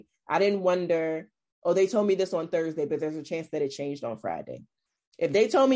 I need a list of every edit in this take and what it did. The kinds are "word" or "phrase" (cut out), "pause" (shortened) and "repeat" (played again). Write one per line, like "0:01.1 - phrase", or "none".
none